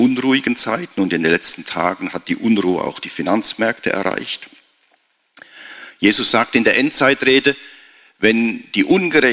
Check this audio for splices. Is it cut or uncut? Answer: uncut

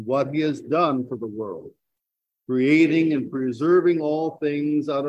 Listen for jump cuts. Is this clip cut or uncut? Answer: uncut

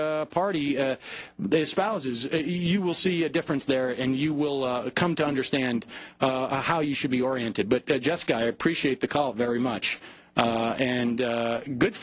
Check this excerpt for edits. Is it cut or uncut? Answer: uncut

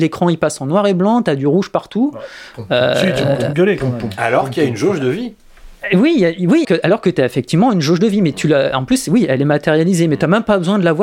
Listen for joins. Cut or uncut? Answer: cut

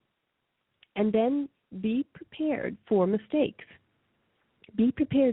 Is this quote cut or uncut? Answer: uncut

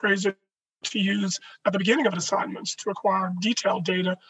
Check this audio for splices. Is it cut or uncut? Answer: uncut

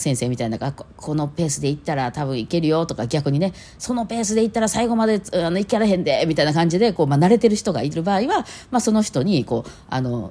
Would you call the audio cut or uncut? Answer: uncut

